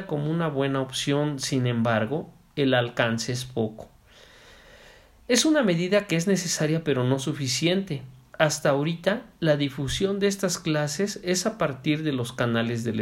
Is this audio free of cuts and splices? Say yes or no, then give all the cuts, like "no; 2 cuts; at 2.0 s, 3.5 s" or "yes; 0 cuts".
yes; 0 cuts